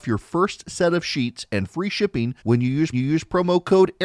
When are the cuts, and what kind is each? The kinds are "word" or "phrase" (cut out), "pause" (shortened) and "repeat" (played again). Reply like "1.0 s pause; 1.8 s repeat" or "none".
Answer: 2.4 s pause; 2.9 s repeat